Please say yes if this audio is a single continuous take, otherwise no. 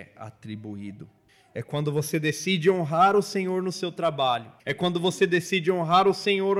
no